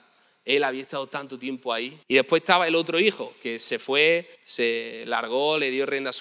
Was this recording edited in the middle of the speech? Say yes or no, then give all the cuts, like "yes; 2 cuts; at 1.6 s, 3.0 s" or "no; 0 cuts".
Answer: yes; 2 cuts; at 2.0 s, 4.4 s